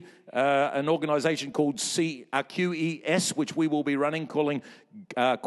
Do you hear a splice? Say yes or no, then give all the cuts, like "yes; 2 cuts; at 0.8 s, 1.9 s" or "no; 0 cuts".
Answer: no; 0 cuts